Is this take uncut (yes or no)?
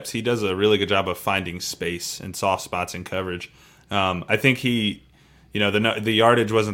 yes